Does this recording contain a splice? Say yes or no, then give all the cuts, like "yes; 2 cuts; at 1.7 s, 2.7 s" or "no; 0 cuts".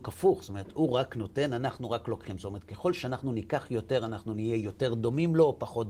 no; 0 cuts